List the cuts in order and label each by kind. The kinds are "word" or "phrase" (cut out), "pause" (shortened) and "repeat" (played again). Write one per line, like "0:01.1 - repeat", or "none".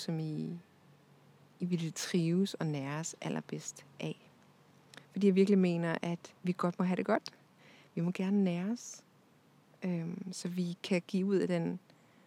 0:06.4 - pause